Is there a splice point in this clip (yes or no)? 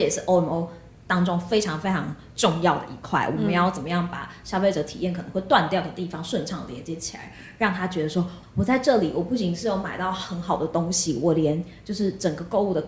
yes